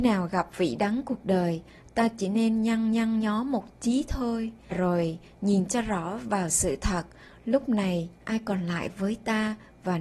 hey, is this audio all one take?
no; 2 cuts; at 2.9 s, 4.7 s

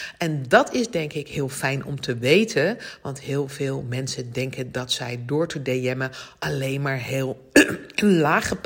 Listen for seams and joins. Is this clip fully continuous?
yes; 0 cuts

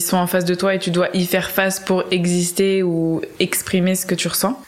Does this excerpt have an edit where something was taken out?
no; 0 cuts

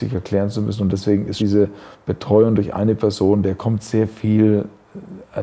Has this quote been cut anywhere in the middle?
yes; 1 cut; at 1.4 s

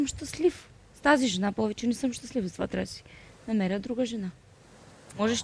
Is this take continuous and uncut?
yes; 0 cuts

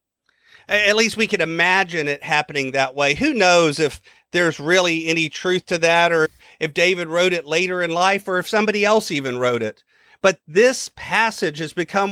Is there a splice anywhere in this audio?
no; 0 cuts

